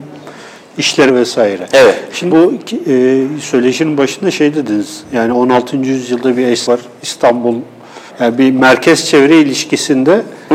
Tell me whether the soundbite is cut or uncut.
cut